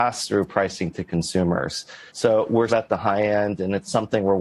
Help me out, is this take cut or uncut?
cut